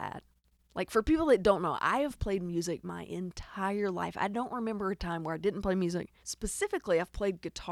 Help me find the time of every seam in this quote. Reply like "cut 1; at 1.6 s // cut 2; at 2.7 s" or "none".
cut 1; at 6.2 s